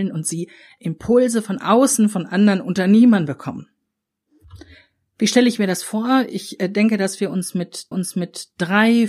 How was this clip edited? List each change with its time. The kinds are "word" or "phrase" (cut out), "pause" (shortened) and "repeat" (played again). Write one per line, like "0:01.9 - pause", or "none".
0:07.9 - repeat